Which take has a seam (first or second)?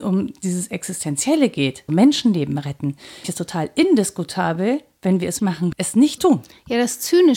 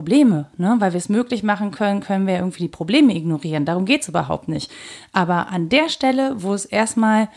first